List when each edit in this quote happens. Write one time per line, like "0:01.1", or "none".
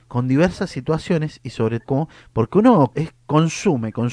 0:01.8
0:02.9